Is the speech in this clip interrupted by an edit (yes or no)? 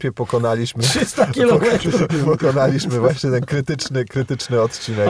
no